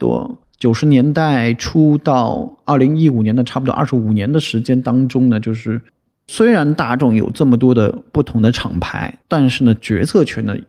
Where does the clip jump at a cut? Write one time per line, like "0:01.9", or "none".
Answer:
0:09.2